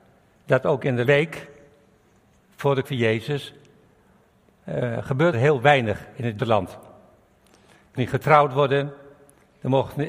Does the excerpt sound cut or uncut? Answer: cut